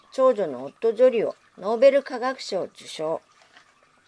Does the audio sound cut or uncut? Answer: cut